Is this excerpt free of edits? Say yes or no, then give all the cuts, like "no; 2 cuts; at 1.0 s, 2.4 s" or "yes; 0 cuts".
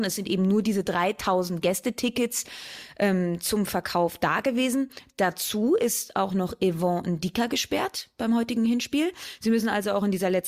yes; 0 cuts